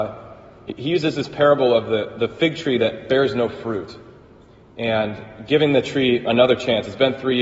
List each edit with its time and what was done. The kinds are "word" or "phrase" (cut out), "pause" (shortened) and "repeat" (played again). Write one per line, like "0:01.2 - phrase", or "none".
none